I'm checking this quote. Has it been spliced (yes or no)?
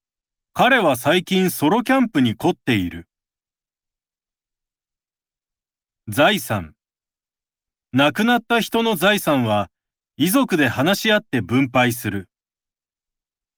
no